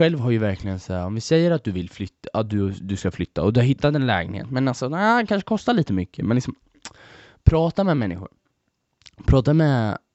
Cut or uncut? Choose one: uncut